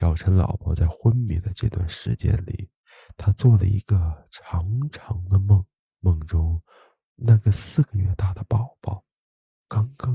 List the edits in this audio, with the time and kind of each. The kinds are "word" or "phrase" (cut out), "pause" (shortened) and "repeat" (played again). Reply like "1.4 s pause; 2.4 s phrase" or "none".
5.9 s pause